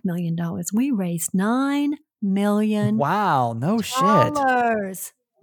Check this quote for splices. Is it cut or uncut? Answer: uncut